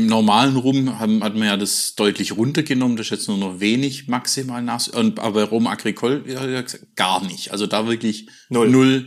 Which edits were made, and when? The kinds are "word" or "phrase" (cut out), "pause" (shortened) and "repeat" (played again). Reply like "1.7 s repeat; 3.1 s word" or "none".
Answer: none